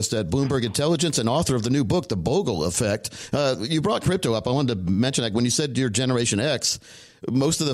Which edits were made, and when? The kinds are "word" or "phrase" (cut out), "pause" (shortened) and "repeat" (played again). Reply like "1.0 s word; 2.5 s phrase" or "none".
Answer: none